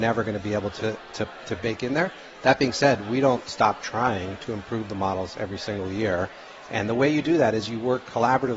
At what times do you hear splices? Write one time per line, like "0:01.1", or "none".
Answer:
none